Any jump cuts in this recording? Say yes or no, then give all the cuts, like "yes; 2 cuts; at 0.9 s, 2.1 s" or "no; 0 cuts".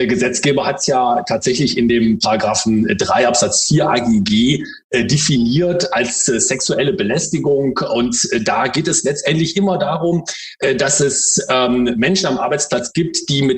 no; 0 cuts